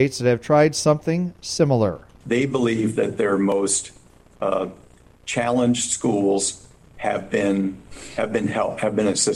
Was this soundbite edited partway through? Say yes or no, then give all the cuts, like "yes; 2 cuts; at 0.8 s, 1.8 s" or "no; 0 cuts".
no; 0 cuts